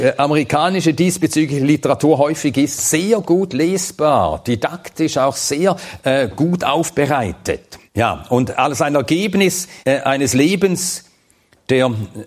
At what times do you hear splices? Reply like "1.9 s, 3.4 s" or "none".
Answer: 7.9 s, 9.8 s